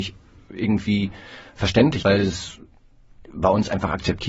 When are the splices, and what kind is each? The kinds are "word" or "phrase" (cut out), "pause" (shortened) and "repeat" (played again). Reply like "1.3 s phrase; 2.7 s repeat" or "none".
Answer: 2.0 s word